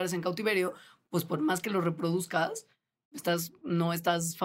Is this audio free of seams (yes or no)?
yes